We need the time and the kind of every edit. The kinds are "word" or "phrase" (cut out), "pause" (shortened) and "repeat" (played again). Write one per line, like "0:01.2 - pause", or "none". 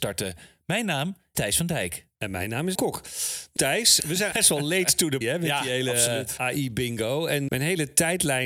0:01.3 - word
0:02.7 - word
0:03.6 - word
0:04.0 - word
0:04.3 - word
0:05.2 - word
0:06.4 - word
0:07.5 - word